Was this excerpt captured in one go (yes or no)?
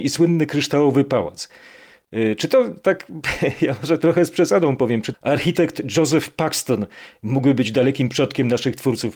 no